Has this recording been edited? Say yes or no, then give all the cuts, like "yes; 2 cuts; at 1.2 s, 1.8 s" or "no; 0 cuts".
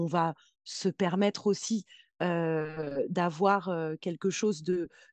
no; 0 cuts